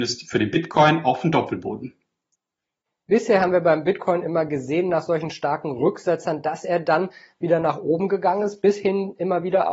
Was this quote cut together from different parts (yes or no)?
no